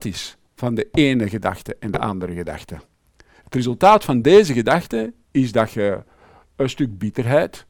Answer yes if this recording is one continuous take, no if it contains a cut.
yes